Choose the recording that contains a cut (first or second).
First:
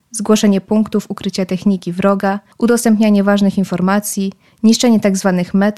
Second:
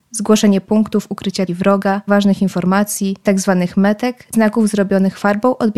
second